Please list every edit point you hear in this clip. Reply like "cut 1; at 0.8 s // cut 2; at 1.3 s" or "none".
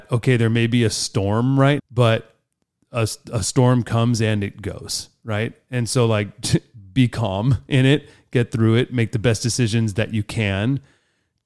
cut 1; at 1.8 s

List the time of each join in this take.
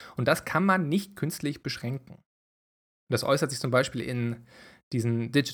none

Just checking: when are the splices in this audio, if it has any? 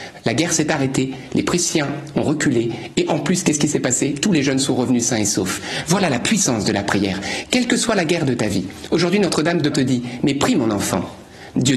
cut 1; at 9.7 s

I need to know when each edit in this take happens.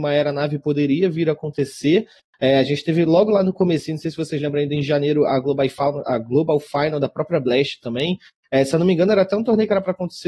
none

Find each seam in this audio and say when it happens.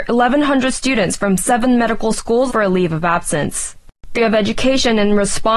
cut 1; at 2.5 s // cut 2; at 4.1 s

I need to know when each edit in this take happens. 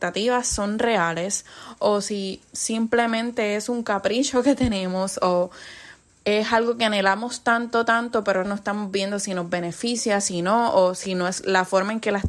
cut 1; at 6.1 s // cut 2; at 8.4 s

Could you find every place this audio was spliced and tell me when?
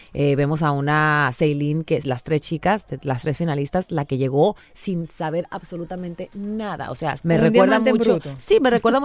cut 1; at 2.0 s // cut 2; at 7.2 s

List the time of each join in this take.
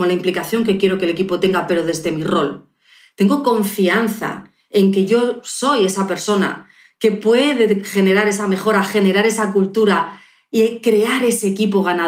none

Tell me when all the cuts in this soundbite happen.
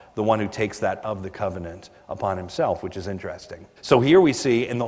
cut 1; at 1.0 s // cut 2; at 3.8 s

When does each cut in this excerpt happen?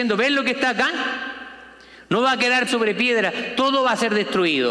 cut 1; at 2.7 s

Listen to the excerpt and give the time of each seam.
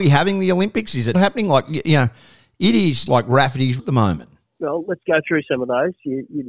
cut 1; at 1.1 s // cut 2; at 3.1 s // cut 3; at 3.8 s // cut 4; at 4.5 s

